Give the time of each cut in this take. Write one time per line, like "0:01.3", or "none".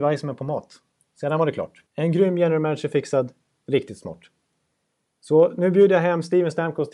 0:01.9